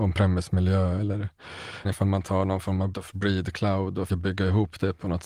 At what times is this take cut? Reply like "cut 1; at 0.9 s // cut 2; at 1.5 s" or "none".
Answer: cut 1; at 1.8 s // cut 2; at 2.9 s // cut 3; at 4.1 s